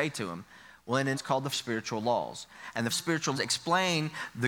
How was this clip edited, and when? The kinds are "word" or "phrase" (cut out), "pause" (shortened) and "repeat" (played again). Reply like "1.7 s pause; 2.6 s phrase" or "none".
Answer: 1.1 s word; 1.5 s word; 2.9 s word; 3.3 s word